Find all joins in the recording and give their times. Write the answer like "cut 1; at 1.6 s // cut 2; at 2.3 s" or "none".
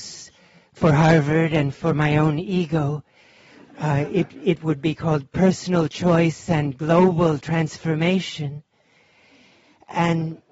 none